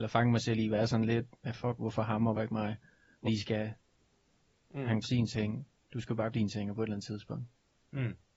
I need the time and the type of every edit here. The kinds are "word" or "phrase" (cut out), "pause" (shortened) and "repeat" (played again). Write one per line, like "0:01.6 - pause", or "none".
0:01.8 - word
0:02.3 - word
0:03.2 - word
0:05.0 - word
0:06.3 - word